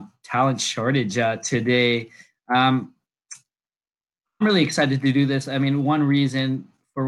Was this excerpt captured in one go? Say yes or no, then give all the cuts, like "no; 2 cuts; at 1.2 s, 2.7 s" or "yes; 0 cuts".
yes; 0 cuts